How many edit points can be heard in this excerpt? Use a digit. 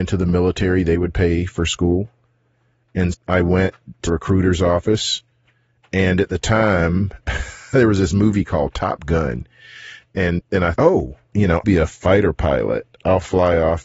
6